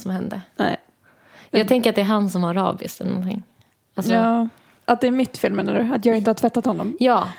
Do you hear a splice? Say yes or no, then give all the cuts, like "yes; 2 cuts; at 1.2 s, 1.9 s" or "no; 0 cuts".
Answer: no; 0 cuts